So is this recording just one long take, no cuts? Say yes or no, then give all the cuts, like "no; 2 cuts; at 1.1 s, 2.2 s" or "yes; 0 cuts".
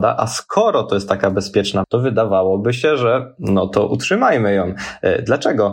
no; 1 cut; at 1.8 s